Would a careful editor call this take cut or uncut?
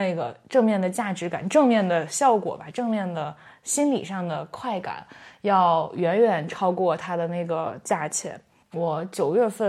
uncut